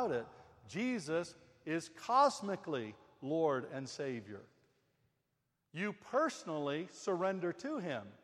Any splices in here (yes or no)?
no